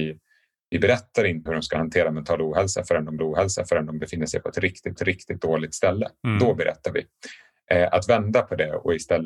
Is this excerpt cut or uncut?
cut